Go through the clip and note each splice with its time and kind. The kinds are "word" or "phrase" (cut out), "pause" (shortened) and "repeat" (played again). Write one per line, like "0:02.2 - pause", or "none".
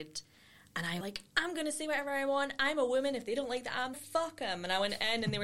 0:01.0 - word
0:03.9 - word